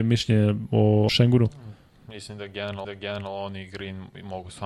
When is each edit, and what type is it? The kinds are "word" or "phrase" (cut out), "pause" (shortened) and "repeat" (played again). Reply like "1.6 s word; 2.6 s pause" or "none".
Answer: 1.1 s word; 2.8 s repeat